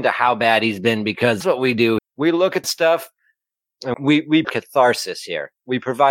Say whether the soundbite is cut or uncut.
cut